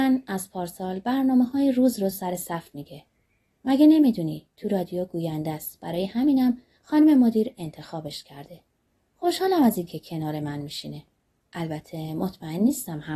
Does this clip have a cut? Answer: no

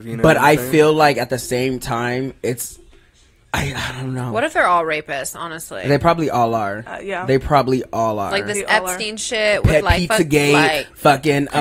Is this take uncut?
yes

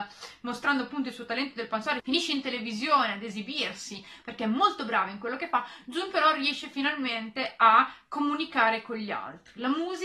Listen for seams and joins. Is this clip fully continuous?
yes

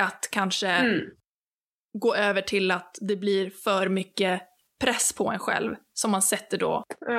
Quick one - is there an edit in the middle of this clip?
no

